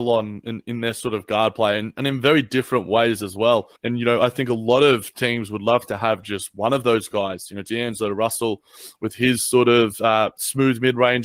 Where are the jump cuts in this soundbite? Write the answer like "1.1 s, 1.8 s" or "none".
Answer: 3.8 s